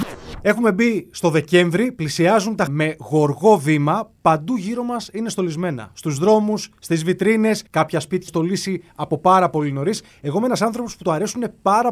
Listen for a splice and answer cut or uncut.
cut